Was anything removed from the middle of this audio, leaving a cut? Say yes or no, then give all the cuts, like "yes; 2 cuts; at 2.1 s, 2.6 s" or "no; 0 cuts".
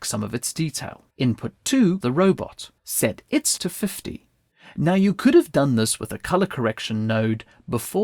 yes; 5 cuts; at 1.1 s, 2.0 s, 2.8 s, 3.6 s, 4.5 s